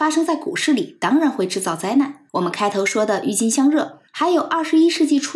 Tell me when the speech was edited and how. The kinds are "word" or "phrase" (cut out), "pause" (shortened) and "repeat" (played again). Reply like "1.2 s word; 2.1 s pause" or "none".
2.3 s pause; 4.1 s pause

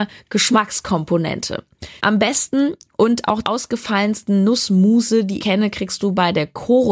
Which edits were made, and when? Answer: 2.0 s pause; 3.4 s word; 5.4 s word

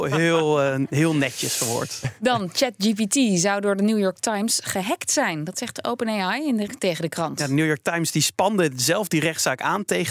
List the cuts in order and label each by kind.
6.7 s word

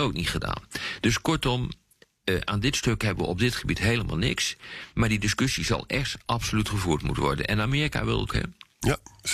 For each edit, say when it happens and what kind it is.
8.3 s word

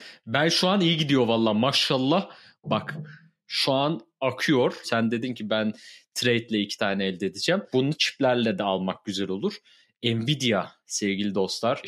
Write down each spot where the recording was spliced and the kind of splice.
none

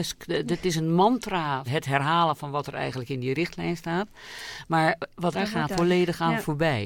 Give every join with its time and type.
1.7 s phrase; 5.3 s phrase; 5.7 s word

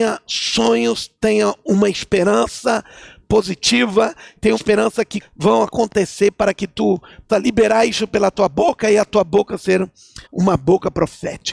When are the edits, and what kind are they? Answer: 4.5 s word; 5.2 s word; 7.3 s word; 10.2 s pause

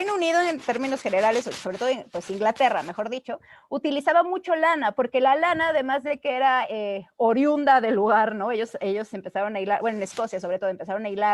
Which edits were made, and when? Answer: none

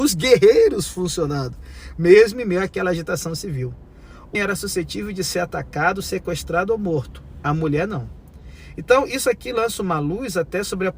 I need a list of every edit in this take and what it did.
4.3 s word

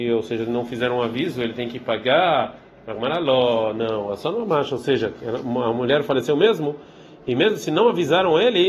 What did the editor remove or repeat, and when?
none

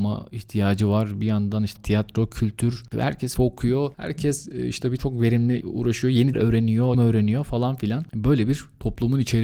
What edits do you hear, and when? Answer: 1.8 s word; 3.4 s word; 5.0 s word; 5.6 s word; 6.3 s word; 6.9 s word

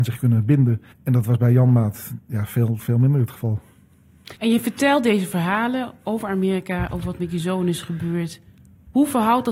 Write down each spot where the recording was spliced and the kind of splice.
0.9 s pause; 4.4 s pause

